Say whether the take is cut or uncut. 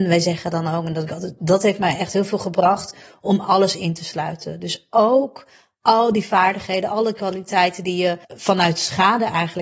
cut